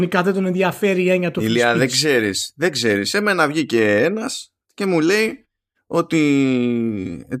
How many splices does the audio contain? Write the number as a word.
one